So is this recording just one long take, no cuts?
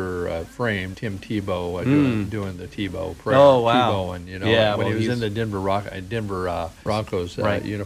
no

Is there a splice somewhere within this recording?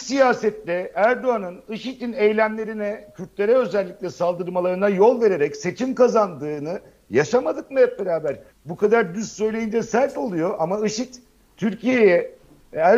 no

